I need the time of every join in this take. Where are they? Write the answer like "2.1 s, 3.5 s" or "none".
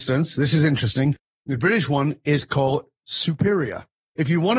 none